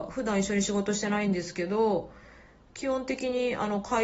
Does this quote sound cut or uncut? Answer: uncut